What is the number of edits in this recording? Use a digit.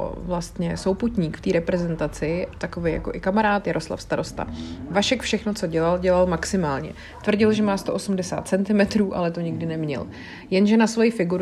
1